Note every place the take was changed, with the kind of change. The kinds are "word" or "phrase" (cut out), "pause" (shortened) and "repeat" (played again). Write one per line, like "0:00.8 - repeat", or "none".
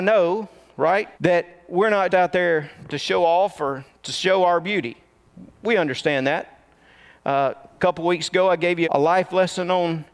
0:01.1 - pause
0:02.1 - word
0:07.8 - word
0:08.8 - word